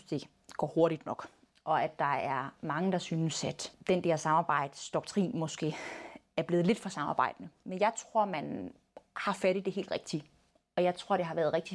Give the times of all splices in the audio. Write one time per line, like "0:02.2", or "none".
none